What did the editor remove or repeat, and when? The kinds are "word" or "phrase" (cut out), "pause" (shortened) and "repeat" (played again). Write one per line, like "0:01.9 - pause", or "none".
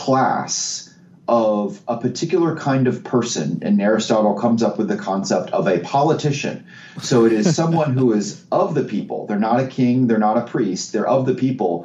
none